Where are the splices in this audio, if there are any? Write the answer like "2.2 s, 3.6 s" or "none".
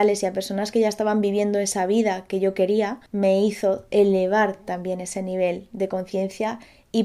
3.1 s